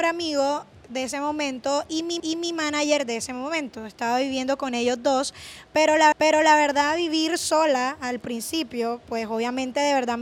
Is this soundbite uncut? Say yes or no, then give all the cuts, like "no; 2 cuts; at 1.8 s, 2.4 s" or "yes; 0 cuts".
no; 2 cuts; at 2.2 s, 6.1 s